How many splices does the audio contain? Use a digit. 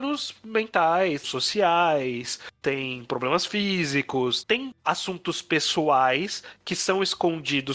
2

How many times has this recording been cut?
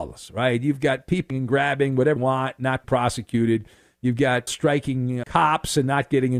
5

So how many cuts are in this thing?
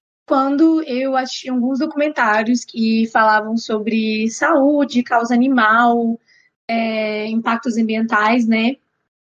0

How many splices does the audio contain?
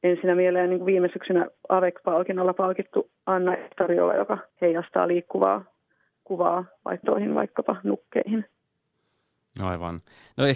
3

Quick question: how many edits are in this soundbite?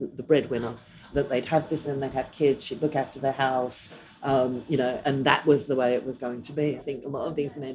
4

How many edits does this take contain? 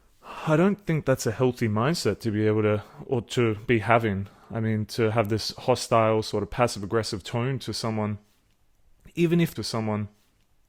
1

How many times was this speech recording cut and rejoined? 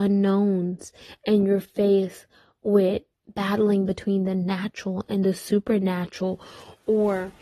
1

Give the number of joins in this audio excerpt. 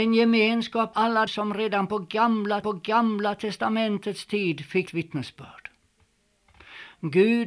4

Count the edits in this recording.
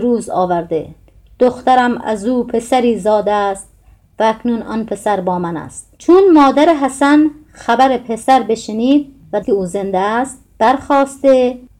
2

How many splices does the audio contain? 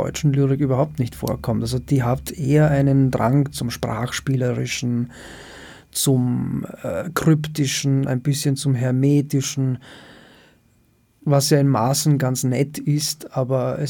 0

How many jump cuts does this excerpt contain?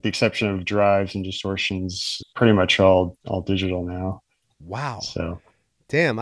1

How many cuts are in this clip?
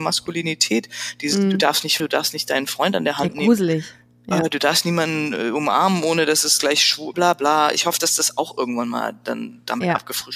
2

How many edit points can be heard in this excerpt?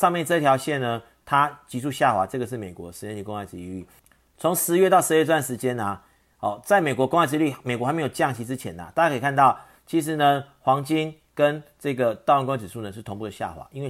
0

